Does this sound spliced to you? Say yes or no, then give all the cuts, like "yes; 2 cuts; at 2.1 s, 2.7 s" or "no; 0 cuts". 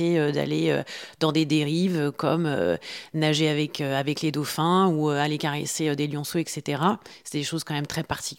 no; 0 cuts